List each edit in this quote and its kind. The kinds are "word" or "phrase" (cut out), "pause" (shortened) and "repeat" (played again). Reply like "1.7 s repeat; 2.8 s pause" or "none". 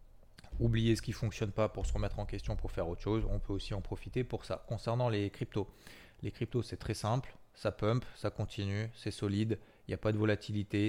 none